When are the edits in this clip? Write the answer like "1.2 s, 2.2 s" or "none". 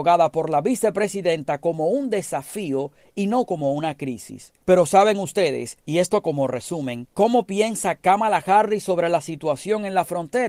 4.6 s, 7.1 s